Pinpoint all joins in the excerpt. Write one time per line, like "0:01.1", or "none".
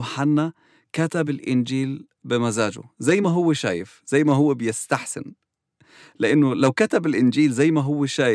none

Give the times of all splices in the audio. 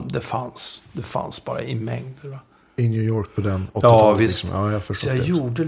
none

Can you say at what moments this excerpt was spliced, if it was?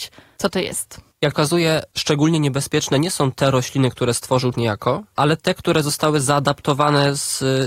0:01.3
0:04.5

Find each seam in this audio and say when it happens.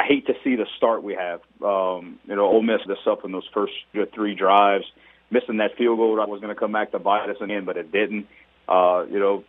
0:02.9
0:03.9
0:06.3
0:07.5

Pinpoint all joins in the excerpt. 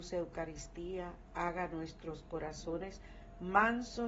none

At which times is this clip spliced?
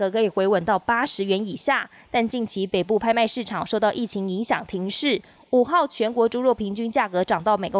none

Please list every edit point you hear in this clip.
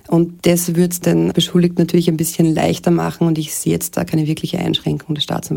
none

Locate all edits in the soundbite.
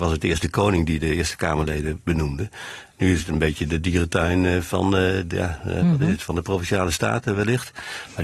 none

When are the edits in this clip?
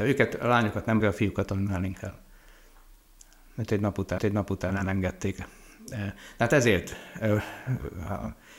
0:01.0
0:04.2

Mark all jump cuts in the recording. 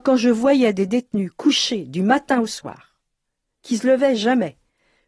none

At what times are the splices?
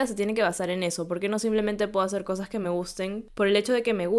none

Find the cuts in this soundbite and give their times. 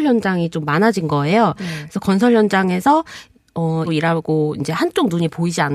0:03.9

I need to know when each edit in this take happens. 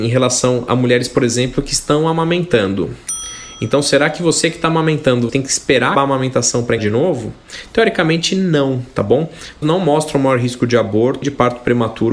0:05.3
0:05.9
0:06.8
0:09.6
0:11.2

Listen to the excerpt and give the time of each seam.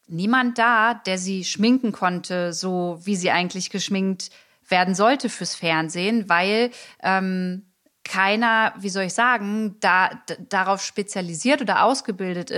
none

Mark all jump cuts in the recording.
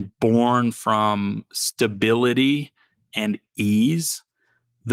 none

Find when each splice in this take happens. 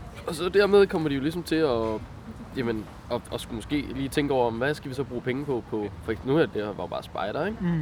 none

